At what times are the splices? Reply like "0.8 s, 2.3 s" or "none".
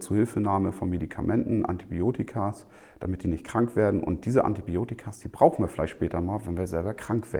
none